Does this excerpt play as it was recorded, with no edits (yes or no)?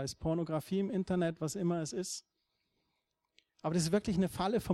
yes